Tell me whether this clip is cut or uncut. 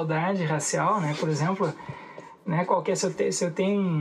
uncut